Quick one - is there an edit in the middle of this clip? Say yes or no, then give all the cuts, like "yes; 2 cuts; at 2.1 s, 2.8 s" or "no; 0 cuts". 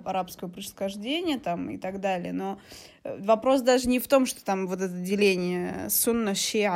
no; 0 cuts